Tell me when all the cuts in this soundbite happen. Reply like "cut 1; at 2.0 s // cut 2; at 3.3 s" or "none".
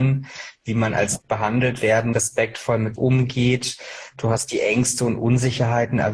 cut 1; at 1.2 s // cut 2; at 2.1 s // cut 3; at 3.0 s